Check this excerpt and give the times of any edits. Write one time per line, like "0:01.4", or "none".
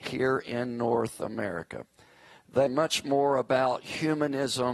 0:02.7